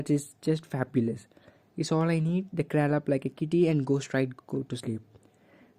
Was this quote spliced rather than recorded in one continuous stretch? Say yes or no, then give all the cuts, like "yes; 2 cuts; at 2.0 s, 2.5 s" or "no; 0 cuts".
no; 0 cuts